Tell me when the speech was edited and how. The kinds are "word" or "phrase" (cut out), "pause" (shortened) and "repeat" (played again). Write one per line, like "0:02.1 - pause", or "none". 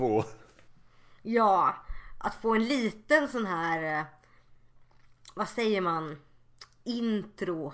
none